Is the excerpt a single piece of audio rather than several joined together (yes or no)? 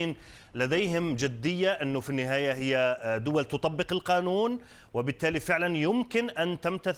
yes